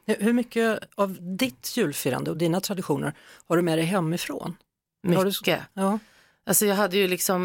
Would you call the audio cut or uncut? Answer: uncut